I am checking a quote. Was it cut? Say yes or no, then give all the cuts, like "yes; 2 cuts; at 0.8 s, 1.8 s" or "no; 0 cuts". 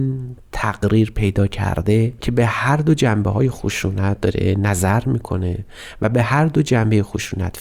no; 0 cuts